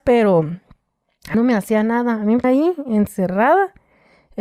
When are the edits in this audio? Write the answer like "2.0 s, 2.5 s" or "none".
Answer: 1.3 s, 2.4 s